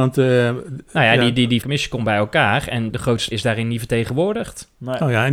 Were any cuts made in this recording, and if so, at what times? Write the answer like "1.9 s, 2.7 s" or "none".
1.6 s, 2.9 s, 3.3 s